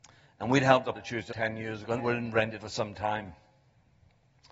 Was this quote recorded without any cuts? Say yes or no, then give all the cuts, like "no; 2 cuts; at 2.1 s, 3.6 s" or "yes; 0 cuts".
no; 4 cuts; at 0.9 s, 1.3 s, 2.0 s, 2.6 s